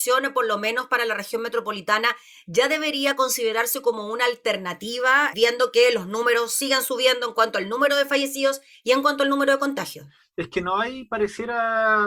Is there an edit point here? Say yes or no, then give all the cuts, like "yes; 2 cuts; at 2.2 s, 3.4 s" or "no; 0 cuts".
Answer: no; 0 cuts